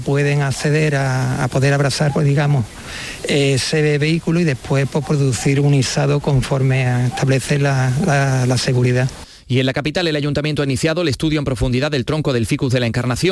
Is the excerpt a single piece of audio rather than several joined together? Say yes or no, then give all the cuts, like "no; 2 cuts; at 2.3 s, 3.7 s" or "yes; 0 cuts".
yes; 0 cuts